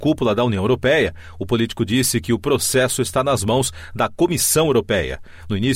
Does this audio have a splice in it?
no; 0 cuts

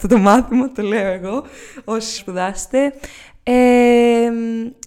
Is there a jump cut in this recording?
yes; 1 cut; at 2.2 s

